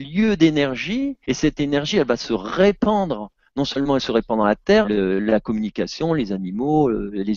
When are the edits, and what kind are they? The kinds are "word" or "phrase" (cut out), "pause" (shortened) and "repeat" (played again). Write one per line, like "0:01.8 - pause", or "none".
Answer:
0:01.2 - pause
0:04.8 - word